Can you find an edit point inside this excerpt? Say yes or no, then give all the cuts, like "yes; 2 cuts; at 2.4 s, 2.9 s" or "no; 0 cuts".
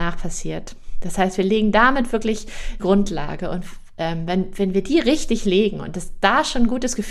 yes; 1 cut; at 2.8 s